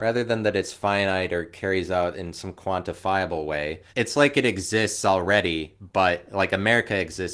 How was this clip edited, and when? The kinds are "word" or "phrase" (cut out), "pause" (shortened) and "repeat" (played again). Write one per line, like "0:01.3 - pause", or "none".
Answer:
0:03.9 - pause